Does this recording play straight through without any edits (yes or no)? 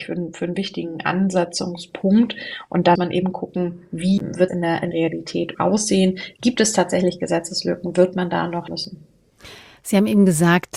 no